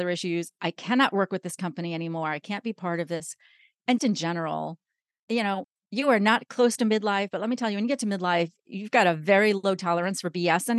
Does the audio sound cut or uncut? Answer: cut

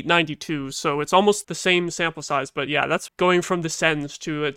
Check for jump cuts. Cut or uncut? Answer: cut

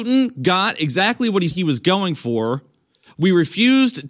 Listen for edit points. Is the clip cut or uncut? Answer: cut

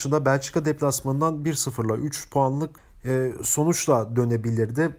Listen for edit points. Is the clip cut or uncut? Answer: cut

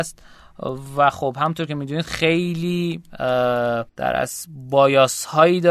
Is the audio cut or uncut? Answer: cut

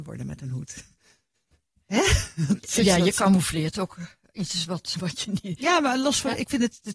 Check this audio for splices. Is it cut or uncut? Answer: cut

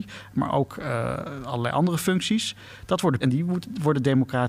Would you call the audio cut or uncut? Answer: cut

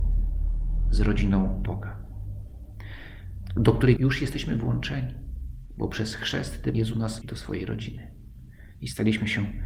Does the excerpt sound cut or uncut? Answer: cut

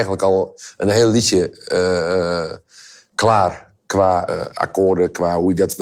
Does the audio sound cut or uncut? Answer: cut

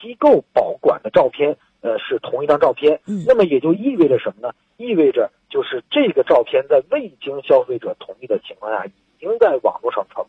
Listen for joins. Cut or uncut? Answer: uncut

